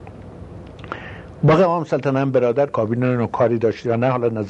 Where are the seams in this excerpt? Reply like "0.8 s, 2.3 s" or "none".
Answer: 2.7 s